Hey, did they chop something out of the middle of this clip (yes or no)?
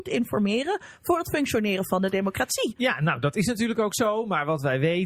no